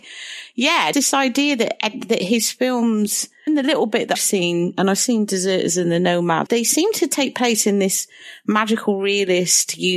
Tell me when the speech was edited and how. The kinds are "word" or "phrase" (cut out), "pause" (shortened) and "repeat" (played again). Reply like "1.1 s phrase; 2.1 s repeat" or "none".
0.9 s word; 3.5 s word; 4.2 s word; 6.5 s word